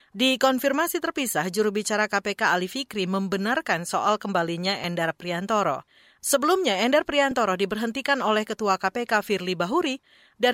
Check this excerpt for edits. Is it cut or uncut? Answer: uncut